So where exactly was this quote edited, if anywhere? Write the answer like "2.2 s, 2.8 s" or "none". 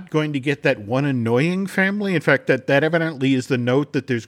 none